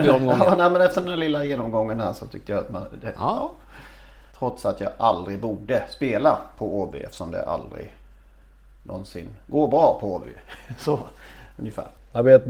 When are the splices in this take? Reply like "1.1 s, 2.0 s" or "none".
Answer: none